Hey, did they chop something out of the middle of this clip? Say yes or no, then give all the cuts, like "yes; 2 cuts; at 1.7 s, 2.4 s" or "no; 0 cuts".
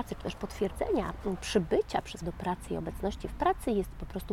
yes; 1 cut; at 2.2 s